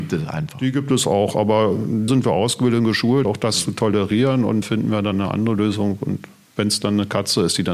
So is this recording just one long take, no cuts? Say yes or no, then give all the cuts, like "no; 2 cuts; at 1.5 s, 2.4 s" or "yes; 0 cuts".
no; 3 cuts; at 2.1 s, 3.2 s, 4.6 s